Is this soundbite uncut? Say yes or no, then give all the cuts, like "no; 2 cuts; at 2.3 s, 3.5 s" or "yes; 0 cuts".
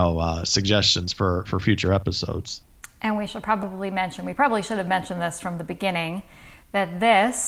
yes; 0 cuts